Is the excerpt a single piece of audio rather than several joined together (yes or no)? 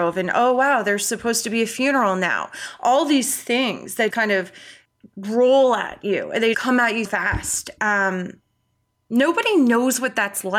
no